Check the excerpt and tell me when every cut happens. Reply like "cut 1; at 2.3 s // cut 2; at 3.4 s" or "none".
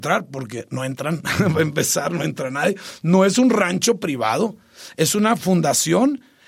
none